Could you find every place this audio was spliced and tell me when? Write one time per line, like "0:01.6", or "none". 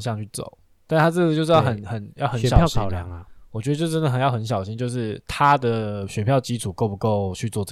0:05.2